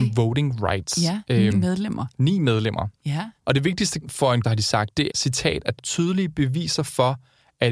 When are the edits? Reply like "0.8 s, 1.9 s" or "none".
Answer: 1.5 s, 4.0 s, 4.4 s, 5.1 s, 5.8 s